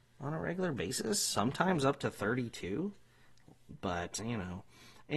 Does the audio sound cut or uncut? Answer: cut